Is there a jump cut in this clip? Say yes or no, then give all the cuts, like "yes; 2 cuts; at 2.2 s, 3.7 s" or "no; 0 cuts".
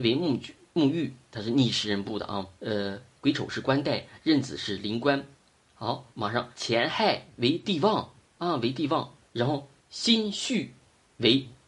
yes; 5 cuts; at 2.5 s, 6.1 s, 6.5 s, 9.3 s, 9.8 s